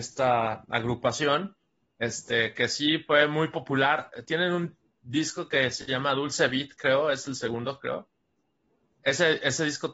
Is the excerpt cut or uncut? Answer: uncut